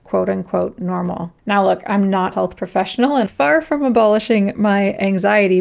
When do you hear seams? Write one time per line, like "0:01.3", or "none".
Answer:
0:01.4
0:02.3
0:03.3

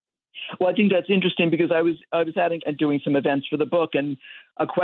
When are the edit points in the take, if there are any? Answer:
0:02.6

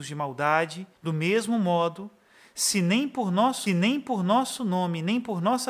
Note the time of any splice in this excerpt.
0:01.0
0:03.7

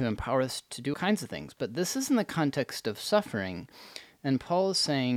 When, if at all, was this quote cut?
0:00.9

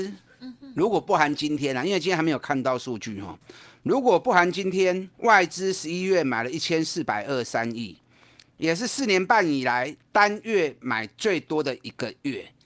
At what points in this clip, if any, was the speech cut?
0:05.1

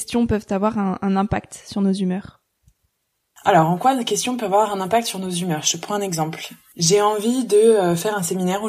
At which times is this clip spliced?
none

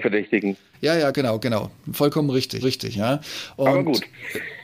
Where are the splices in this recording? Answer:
0:01.1
0:02.6

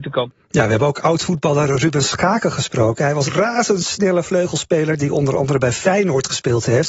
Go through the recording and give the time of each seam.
0:03.3

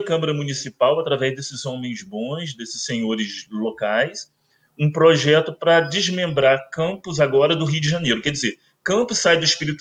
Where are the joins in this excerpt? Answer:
none

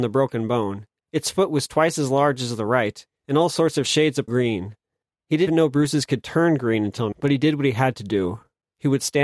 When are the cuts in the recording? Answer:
0:04.3
0:05.5
0:07.1

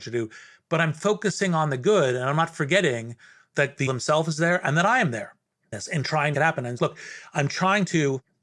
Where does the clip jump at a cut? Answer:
0:03.9
0:05.7
0:06.3
0:06.8

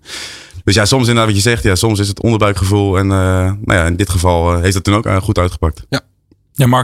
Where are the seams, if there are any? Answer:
none

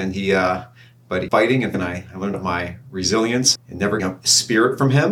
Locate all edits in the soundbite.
0:01.3
0:01.7
0:02.3
0:03.5
0:04.0

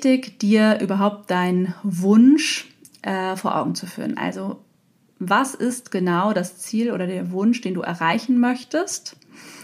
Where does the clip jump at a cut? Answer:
none

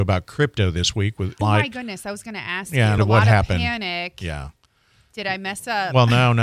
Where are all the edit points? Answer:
0:01.4
0:03.0

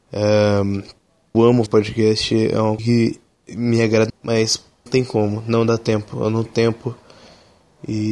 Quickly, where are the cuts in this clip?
0:01.3
0:01.7
0:02.8
0:04.1
0:04.9
0:06.4

